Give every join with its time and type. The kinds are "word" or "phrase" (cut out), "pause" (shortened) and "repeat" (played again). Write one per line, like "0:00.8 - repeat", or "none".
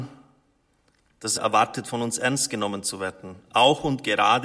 0:01.4 - word